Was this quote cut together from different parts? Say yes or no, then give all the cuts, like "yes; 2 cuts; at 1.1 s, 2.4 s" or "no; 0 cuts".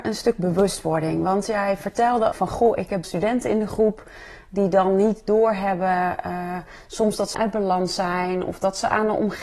yes; 3 cuts; at 2.3 s, 3.0 s, 7.3 s